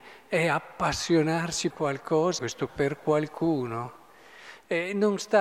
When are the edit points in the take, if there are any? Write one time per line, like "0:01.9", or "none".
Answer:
0:01.7
0:02.4
0:02.7